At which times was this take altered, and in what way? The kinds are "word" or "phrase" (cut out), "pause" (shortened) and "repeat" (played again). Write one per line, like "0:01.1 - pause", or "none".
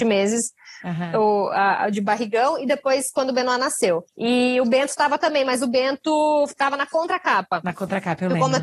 0:04.1 - pause